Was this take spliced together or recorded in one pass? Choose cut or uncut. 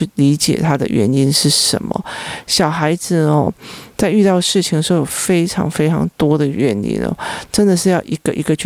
uncut